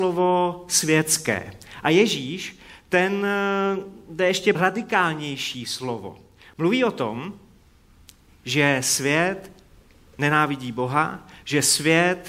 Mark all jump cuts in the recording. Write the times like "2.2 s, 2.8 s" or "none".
4.5 s